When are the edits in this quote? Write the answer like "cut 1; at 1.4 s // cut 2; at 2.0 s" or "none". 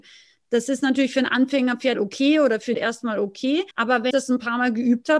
cut 1; at 1.9 s // cut 2; at 2.7 s // cut 3; at 3.7 s // cut 4; at 4.1 s